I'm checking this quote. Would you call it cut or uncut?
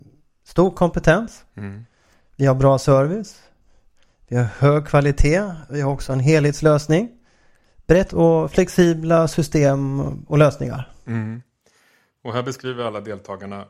cut